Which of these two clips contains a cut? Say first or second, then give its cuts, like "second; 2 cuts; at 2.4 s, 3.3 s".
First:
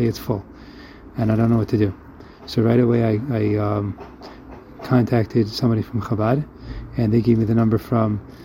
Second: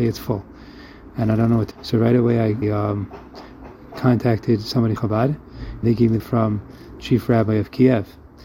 second; 6 cuts; at 1.7 s, 2.6 s, 5.0 s, 5.8 s, 6.2 s, 7.0 s